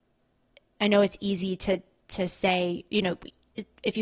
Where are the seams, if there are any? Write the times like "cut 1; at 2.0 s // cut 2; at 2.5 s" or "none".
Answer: none